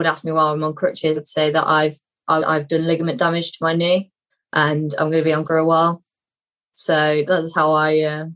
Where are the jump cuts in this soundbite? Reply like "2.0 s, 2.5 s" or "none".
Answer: 1.2 s, 2.4 s, 4.3 s, 5.4 s, 7.3 s